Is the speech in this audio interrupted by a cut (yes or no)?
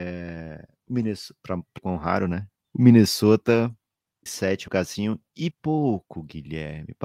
yes